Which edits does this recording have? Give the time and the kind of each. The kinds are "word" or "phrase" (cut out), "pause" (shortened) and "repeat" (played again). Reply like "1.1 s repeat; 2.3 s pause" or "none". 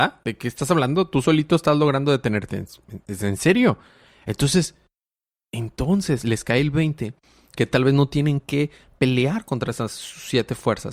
none